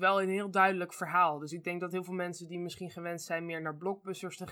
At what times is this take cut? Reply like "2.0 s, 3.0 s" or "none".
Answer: none